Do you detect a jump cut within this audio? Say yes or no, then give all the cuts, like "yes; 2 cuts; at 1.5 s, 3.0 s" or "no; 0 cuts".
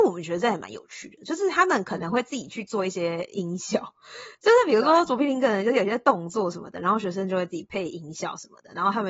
yes; 1 cut; at 4.3 s